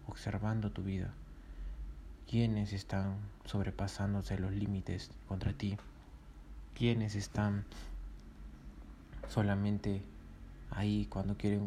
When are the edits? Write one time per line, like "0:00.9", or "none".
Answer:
none

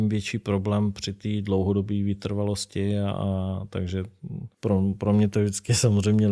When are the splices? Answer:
0:04.5

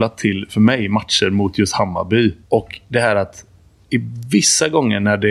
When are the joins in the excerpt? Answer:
0:02.4

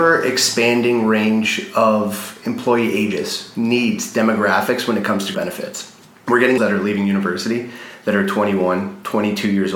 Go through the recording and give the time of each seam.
0:05.3
0:06.6

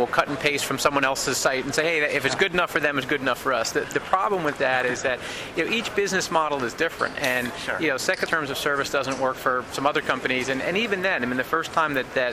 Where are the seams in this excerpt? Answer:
0:03.8
0:08.3
0:09.3

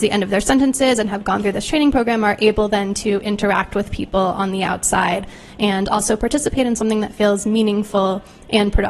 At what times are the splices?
none

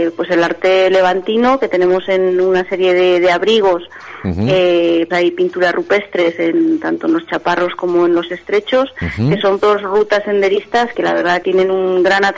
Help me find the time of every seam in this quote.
0:05.1
0:09.6
0:10.9
0:11.4

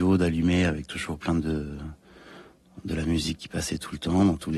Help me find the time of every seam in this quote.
none

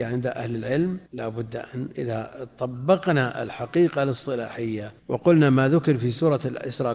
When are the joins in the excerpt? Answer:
0:01.1
0:05.0

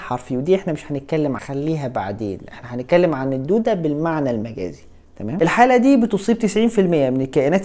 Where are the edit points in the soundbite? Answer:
0:01.4

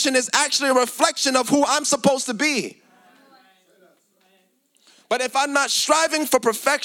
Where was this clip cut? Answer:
none

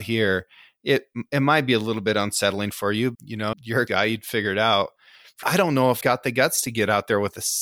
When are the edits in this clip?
0:03.1
0:03.5
0:03.9
0:05.4
0:06.0

